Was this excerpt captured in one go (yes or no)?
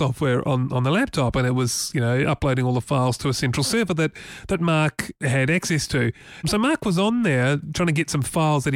yes